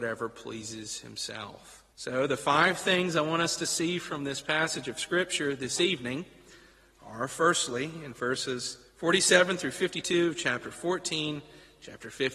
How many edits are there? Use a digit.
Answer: 2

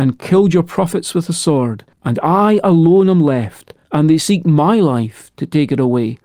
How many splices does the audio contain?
2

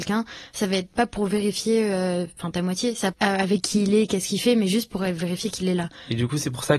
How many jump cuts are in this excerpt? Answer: 2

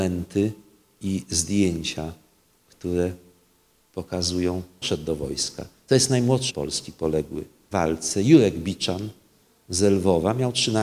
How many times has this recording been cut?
3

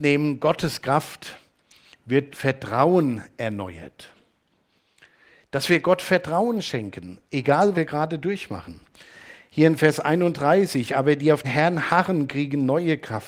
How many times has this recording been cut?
3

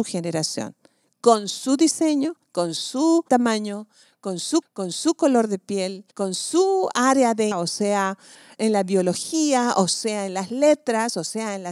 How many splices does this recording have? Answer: 6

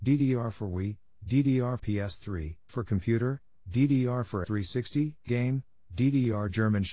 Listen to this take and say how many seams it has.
4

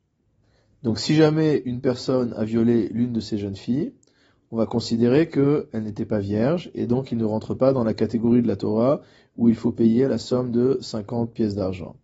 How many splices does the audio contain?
0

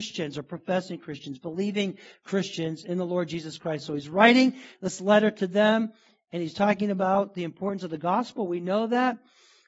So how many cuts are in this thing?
0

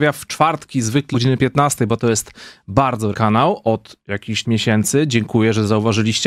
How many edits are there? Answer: 4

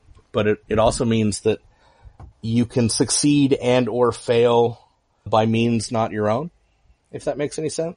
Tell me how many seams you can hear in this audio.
2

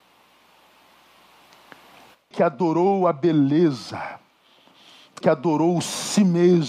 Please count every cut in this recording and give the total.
2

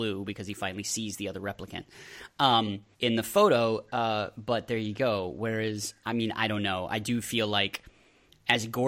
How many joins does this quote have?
1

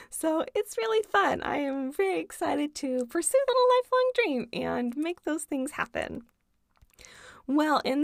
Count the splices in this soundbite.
1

